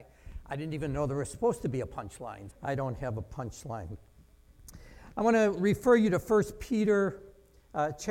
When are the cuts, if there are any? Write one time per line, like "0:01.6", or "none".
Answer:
0:02.5